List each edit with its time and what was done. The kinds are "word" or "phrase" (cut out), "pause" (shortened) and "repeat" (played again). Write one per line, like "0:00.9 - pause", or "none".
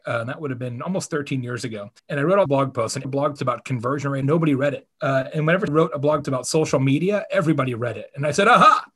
0:02.0 - pause
0:02.5 - word
0:03.0 - phrase
0:03.4 - word
0:04.2 - word
0:04.9 - pause
0:05.7 - phrase
0:06.2 - word